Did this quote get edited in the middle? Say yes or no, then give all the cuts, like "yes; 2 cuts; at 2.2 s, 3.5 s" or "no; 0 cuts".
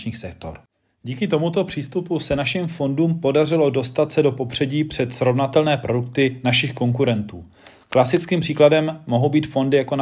no; 0 cuts